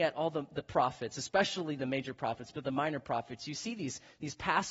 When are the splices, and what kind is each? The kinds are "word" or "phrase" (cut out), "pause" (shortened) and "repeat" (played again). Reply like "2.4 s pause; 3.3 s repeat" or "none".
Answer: none